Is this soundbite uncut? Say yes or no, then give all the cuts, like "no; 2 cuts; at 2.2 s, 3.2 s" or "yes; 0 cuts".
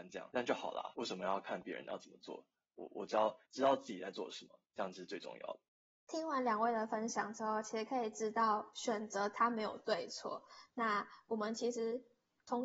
no; 3 cuts; at 3.5 s, 4.7 s, 5.8 s